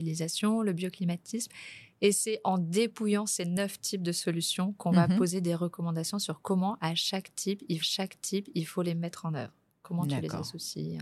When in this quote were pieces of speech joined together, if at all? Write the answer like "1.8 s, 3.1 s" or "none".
7.8 s